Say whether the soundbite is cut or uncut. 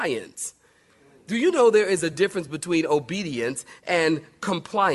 uncut